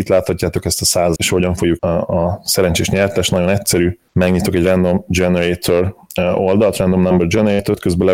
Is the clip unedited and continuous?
no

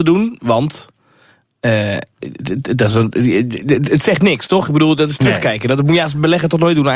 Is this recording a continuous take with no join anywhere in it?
yes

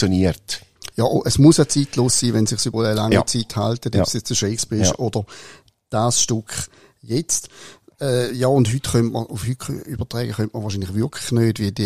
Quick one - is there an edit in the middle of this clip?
yes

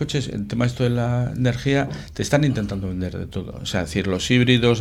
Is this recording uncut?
yes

